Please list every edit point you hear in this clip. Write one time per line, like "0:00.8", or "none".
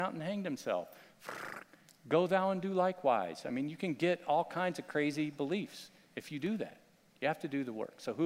none